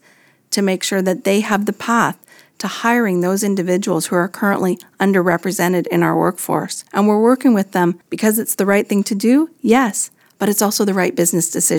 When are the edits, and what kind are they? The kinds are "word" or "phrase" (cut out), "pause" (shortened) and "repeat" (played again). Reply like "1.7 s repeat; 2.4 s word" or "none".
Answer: 6.9 s pause; 8.0 s pause